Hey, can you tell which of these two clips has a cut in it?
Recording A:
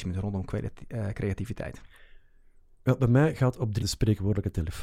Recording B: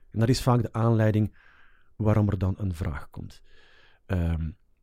A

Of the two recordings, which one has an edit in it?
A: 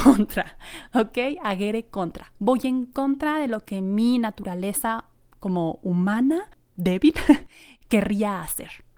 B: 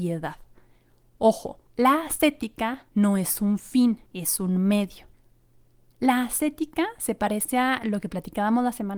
B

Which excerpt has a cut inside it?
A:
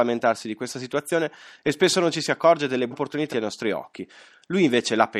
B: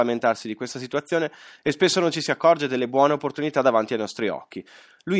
A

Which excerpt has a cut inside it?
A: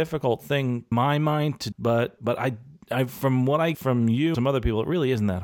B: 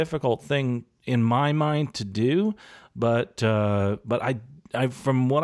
A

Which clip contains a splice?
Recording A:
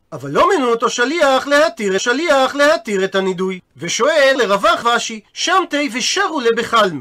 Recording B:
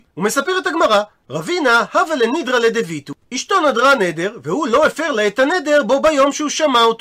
A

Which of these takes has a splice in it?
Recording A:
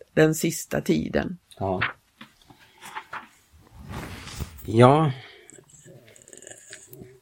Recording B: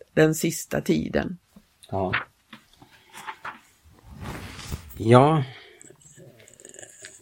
A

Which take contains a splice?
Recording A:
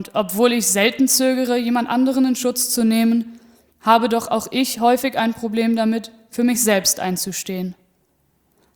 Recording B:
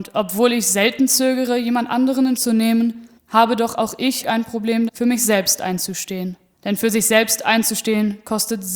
B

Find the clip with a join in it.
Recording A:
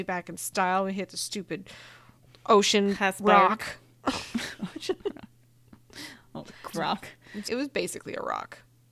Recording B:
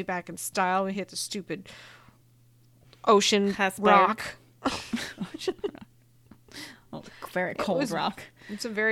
A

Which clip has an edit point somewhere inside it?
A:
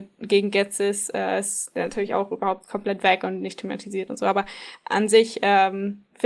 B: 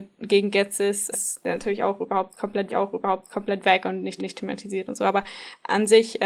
B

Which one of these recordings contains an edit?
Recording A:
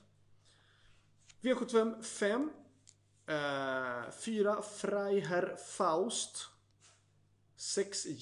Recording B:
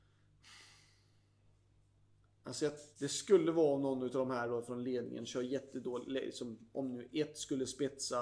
B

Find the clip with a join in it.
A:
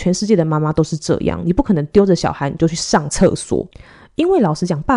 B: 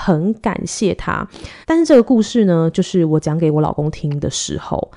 B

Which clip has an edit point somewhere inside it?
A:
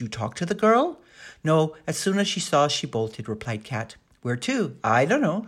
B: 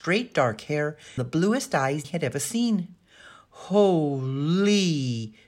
B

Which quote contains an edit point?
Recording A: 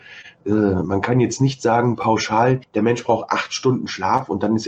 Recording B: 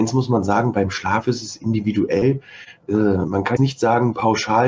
B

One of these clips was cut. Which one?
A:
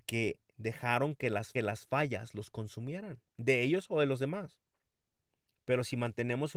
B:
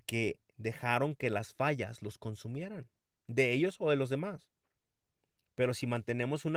A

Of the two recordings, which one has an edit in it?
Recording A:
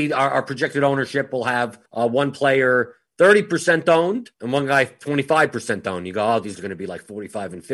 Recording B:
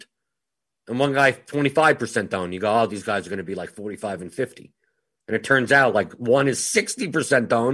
A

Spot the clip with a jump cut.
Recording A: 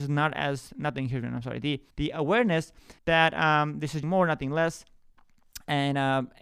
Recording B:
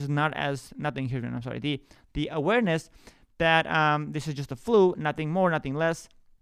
A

